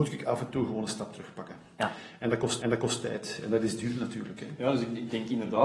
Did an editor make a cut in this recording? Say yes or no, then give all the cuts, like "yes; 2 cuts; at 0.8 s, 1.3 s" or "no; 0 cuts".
yes; 1 cut; at 2.6 s